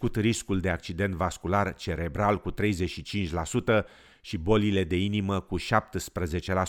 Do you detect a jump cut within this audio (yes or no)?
no